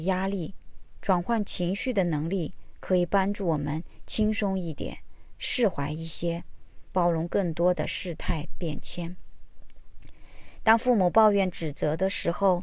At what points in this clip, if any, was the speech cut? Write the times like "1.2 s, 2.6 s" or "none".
6.9 s

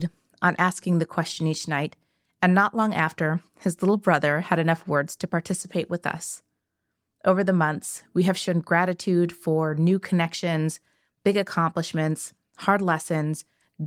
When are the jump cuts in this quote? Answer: none

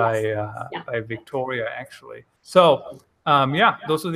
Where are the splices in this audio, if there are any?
2.4 s

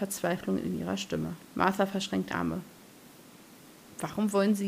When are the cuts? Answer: 1.4 s, 2.3 s

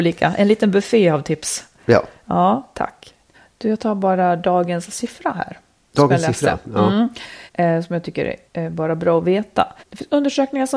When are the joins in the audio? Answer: 3.3 s, 7.5 s, 8.5 s, 9.8 s

